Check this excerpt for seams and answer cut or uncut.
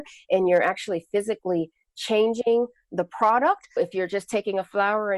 cut